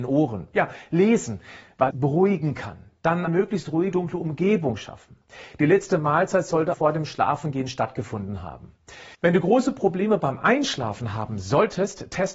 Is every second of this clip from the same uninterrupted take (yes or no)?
no